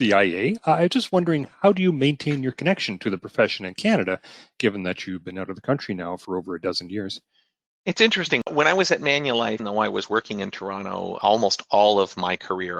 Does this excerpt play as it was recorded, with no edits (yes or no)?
no